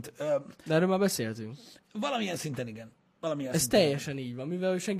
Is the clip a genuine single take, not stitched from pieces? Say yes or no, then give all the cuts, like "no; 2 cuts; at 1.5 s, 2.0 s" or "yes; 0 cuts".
yes; 0 cuts